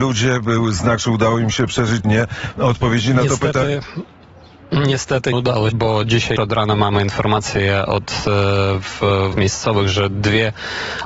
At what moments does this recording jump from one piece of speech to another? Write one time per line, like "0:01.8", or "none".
0:01.0
0:02.0
0:05.3
0:05.7
0:06.4
0:09.3